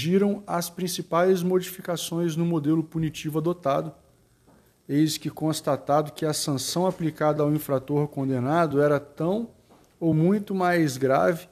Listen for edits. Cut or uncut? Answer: uncut